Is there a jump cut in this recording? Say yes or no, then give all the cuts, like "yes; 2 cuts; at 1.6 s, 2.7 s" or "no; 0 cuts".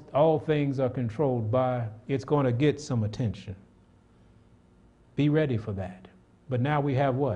no; 0 cuts